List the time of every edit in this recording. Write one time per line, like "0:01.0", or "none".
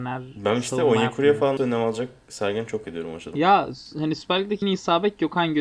0:01.6
0:02.8
0:04.6